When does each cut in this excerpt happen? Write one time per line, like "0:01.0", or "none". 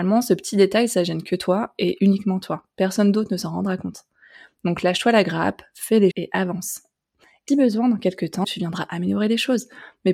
0:06.1
0:07.5
0:08.4